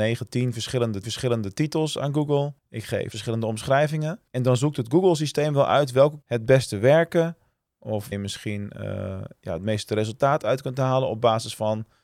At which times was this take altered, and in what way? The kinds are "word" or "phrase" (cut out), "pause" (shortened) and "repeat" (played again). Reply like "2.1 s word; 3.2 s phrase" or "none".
1.0 s repeat; 2.6 s pause; 3.1 s phrase; 4.3 s pause; 6.2 s phrase; 8.1 s word